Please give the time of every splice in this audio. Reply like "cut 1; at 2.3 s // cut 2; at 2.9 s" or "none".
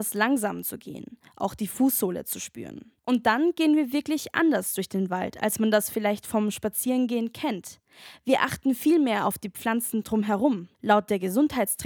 cut 1; at 3.0 s // cut 2; at 10.7 s